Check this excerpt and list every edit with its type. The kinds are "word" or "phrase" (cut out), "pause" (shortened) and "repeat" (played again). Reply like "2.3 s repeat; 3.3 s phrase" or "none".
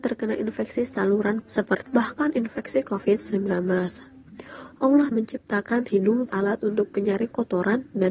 1.4 s word; 1.9 s word; 5.1 s word; 5.8 s word; 6.3 s word

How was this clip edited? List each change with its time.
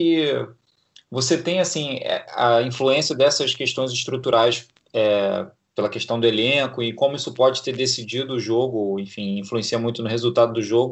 none

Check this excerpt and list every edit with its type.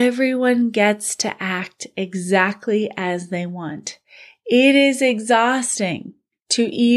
none

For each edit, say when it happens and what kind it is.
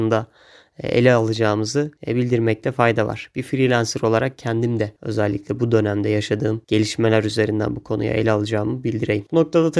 2.0 s pause; 5.0 s pause; 6.6 s pause

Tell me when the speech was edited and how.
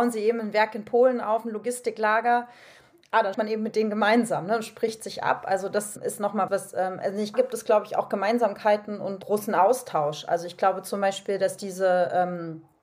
3.3 s word; 6.5 s word; 7.3 s word

